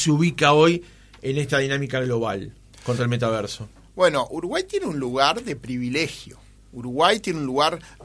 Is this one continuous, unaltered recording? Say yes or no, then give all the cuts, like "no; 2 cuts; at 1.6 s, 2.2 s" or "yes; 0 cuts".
no; 1 cut; at 3.0 s